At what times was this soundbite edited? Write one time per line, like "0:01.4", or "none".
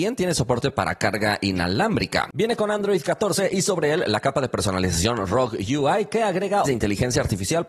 0:06.7